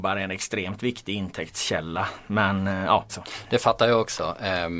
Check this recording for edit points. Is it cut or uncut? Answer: cut